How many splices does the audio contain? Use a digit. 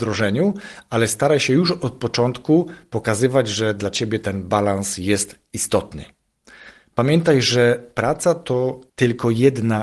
1